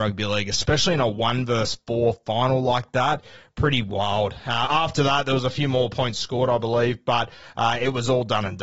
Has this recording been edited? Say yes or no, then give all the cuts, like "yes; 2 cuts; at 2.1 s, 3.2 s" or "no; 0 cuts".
no; 0 cuts